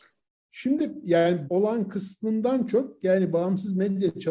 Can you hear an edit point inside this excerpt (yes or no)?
yes